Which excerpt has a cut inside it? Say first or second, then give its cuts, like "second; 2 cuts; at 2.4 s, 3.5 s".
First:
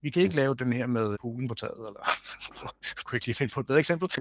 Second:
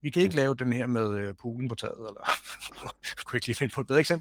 first; 1 cut; at 1.1 s